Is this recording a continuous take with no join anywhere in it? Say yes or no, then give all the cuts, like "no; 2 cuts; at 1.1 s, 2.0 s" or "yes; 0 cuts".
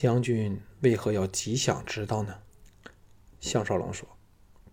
no; 1 cut; at 2.5 s